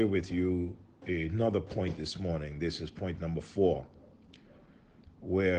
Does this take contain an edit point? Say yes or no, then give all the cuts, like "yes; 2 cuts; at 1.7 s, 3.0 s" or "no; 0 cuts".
no; 0 cuts